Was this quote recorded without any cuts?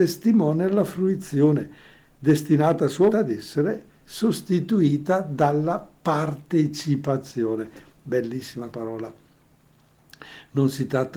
no; 2 cuts; at 3.1 s, 8.7 s

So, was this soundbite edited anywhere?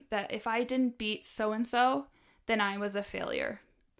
no; 0 cuts

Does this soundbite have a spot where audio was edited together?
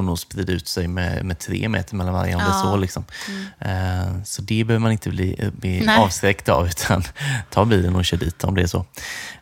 no; 0 cuts

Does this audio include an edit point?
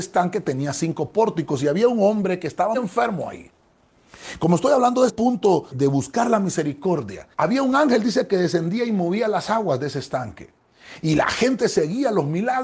yes; 4 cuts; at 2.7 s, 5.1 s, 5.7 s, 7.3 s

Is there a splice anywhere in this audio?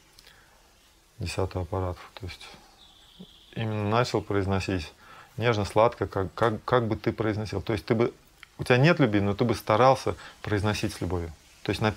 no; 0 cuts

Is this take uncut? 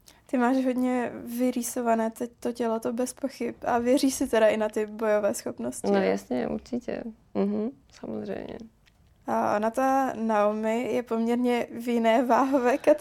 no; 1 cut; at 7.8 s

